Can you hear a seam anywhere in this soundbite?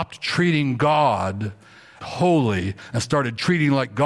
yes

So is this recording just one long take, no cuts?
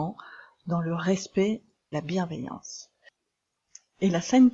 no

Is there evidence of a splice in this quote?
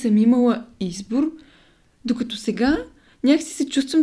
no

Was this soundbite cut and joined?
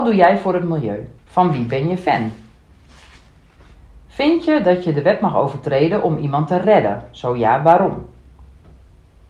yes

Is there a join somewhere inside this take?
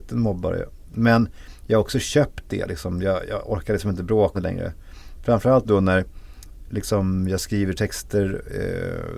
yes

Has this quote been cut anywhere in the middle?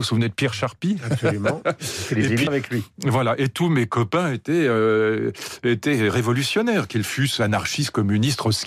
yes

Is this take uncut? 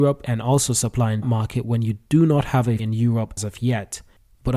no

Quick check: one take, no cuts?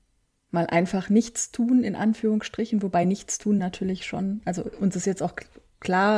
yes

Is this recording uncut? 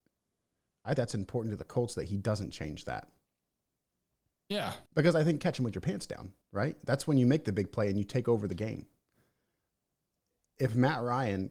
no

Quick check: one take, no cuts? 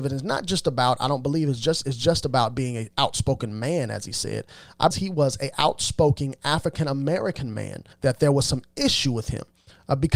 no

